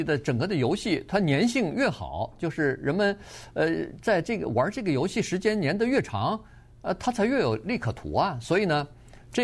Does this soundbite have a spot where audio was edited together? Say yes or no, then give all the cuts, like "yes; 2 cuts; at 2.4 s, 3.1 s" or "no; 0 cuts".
no; 0 cuts